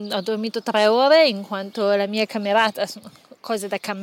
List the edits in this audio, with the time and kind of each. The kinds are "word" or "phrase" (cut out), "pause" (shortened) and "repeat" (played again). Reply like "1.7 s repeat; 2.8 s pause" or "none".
none